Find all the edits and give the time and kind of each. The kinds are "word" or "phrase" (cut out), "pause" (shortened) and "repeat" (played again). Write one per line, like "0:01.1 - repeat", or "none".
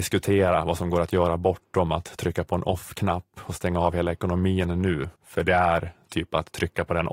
0:05.2 - pause